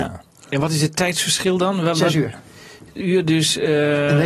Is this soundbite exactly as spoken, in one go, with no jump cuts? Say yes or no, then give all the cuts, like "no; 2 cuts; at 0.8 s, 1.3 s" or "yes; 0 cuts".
no; 1 cut; at 3.0 s